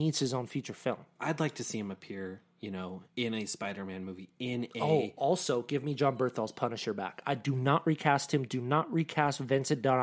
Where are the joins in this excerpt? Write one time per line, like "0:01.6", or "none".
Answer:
0:01.1
0:03.1